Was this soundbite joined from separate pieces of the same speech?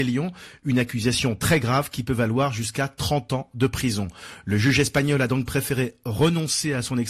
no; 0 cuts

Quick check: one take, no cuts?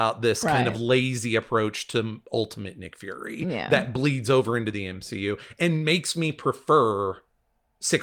yes; 0 cuts

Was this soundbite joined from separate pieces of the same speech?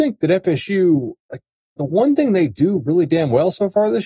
yes; 1 cut; at 1.2 s

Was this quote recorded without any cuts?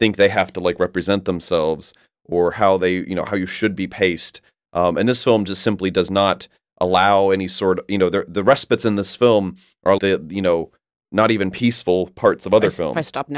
no; 1 cut; at 10.0 s

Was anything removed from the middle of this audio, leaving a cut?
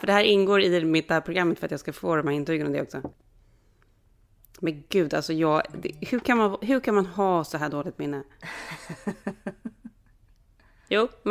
no; 0 cuts

